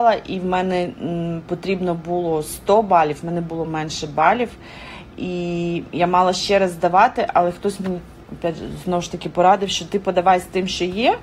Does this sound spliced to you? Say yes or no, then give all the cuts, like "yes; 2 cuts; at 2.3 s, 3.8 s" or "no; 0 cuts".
no; 0 cuts